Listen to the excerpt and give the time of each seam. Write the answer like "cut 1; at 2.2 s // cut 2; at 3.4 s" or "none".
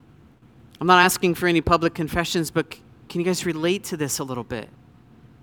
none